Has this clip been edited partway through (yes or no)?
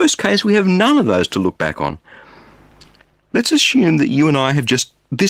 no